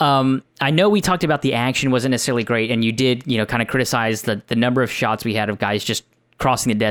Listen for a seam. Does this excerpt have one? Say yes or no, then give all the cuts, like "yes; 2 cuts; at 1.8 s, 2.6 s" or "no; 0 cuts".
no; 0 cuts